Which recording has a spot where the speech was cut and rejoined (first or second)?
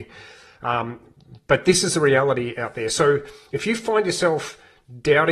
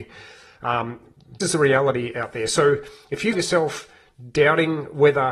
second